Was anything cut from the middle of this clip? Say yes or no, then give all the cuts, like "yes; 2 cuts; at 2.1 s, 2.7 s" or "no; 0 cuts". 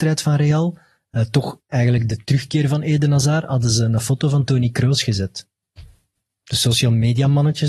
no; 0 cuts